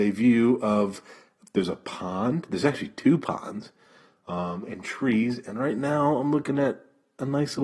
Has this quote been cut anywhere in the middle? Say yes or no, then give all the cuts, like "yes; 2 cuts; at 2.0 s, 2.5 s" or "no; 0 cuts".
no; 0 cuts